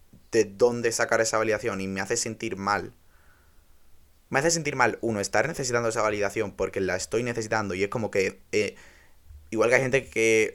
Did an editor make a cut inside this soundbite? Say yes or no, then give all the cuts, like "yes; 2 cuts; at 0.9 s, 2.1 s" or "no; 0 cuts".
no; 0 cuts